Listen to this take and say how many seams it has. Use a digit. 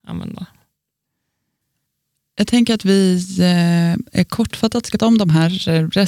1